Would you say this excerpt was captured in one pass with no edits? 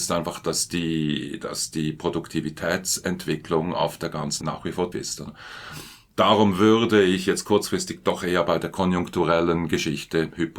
no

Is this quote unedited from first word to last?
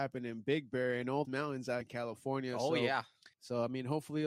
no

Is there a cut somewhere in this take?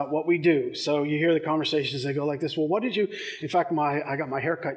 no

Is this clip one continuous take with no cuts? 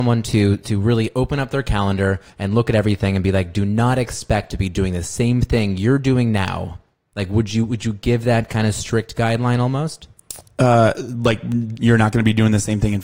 no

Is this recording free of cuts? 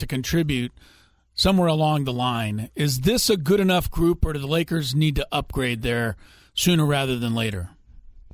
yes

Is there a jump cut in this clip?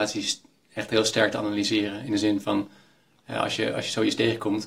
no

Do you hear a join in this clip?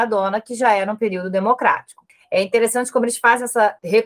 no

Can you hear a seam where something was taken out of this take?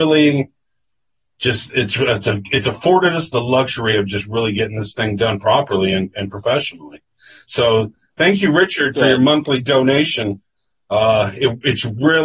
no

